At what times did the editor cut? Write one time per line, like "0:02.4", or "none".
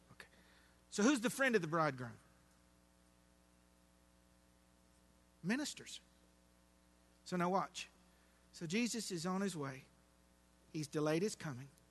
none

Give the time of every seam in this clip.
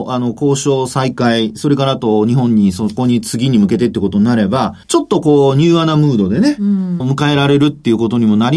0:04.8
0:07.0

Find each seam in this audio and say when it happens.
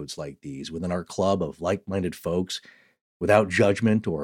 none

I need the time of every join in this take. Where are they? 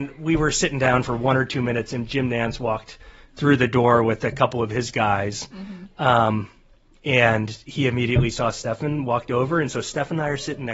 none

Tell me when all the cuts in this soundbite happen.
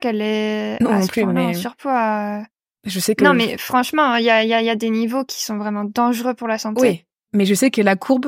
none

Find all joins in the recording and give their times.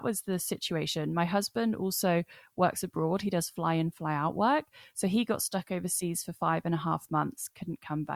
none

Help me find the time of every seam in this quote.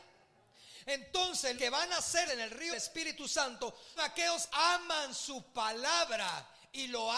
0:01.6
0:02.3
0:02.7
0:04.0
0:04.5

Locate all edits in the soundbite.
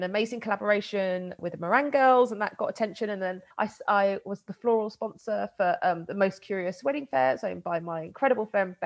0:03.5

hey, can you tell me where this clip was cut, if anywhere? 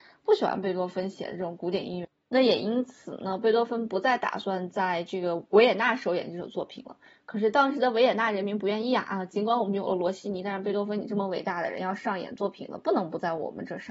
none

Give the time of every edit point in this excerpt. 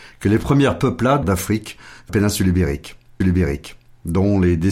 0:01.2
0:02.1
0:03.2

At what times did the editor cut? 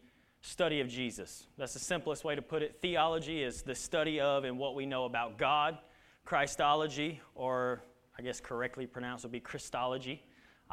none

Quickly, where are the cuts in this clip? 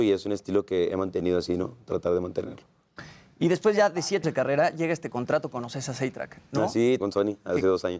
0:04.2
0:07.0

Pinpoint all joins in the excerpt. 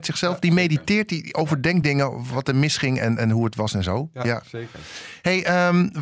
none

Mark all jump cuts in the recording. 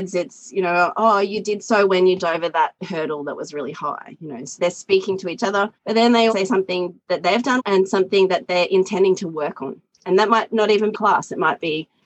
0:01.9
0:02.2
0:02.8
0:04.6
0:05.8
0:06.3
0:07.0
0:07.6
0:10.9

